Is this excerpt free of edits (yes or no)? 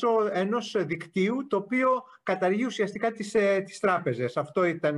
yes